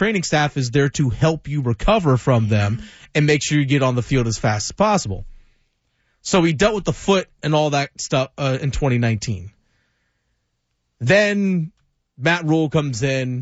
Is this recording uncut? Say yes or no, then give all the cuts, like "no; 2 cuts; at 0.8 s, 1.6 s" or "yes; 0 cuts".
yes; 0 cuts